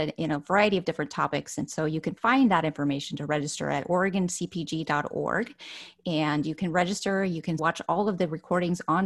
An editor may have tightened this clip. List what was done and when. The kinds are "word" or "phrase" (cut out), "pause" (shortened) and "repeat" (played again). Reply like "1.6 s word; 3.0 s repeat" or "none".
7.6 s word

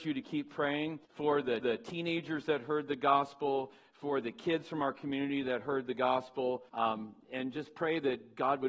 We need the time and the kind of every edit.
1.0 s pause; 1.6 s repeat; 6.7 s pause

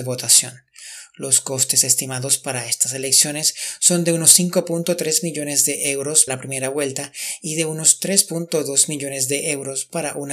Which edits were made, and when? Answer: 6.3 s word

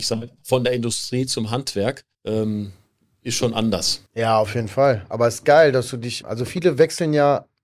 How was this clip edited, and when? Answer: 2.1 s pause; 4.1 s pause; 6.2 s word

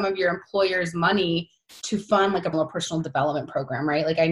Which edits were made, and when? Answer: 2.5 s word

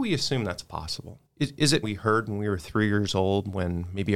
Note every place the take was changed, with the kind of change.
1.3 s pause; 1.8 s phrase

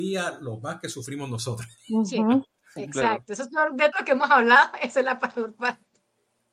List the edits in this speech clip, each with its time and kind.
3.9 s word

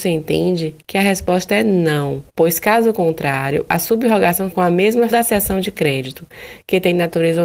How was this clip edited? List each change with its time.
2.3 s pause; 4.5 s word; 5.1 s word

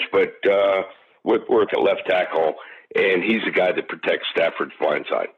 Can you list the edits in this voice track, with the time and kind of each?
1.7 s phrase

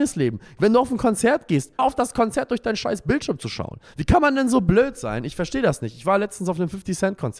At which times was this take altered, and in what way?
1.8 s word

